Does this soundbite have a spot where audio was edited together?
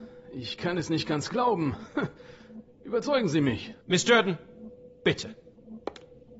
yes; 1 cut; at 3.8 s

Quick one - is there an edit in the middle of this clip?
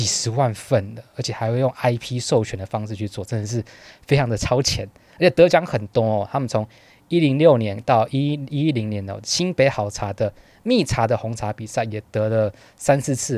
no; 0 cuts

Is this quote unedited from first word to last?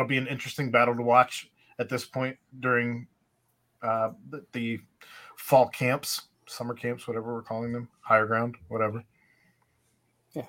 no; 1 cut; at 6.3 s

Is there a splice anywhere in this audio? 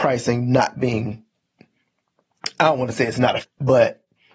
yes; 1 cut; at 3.4 s

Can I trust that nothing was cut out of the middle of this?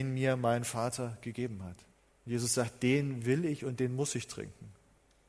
no; 1 cut; at 1.9 s

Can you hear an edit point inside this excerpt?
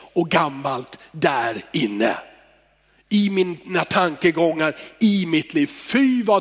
no; 0 cuts

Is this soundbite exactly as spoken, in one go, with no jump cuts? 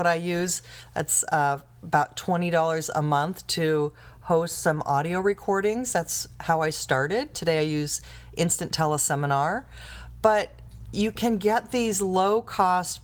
yes; 0 cuts

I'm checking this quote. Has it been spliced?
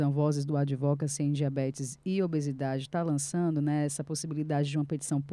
no; 0 cuts

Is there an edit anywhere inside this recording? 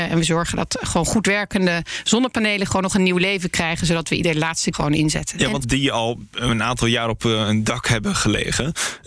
yes; 2 cuts; at 4.7 s, 5.6 s

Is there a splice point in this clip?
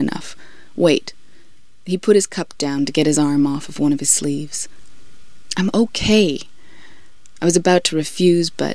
no; 0 cuts

